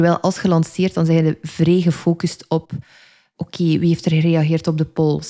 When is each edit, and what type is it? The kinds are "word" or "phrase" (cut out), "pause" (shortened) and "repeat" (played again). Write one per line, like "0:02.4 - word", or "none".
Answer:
none

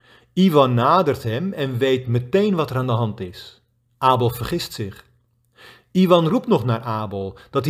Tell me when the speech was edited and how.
none

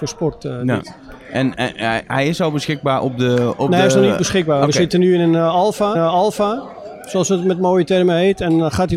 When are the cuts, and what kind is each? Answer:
0:01.5 - word
0:05.9 - repeat

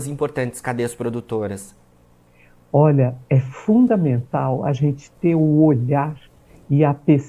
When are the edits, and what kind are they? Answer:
none

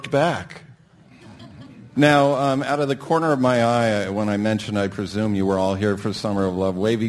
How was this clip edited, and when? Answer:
none

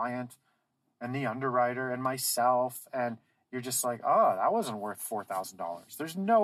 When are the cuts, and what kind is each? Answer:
none

